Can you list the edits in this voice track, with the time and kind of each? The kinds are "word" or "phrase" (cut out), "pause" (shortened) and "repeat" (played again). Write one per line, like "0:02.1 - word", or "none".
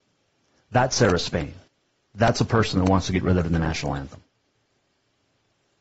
0:01.7 - pause